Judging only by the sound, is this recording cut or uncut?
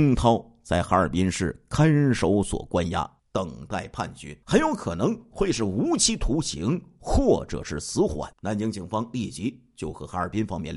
cut